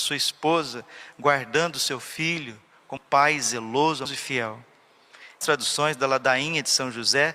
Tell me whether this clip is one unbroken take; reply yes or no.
no